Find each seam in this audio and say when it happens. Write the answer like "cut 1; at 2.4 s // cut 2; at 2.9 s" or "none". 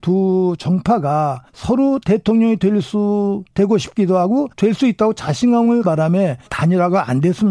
cut 1; at 1.5 s // cut 2; at 3.5 s // cut 3; at 4.5 s // cut 4; at 5.8 s // cut 5; at 6.5 s